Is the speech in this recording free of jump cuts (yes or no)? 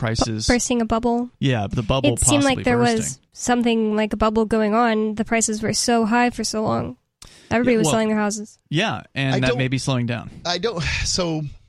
no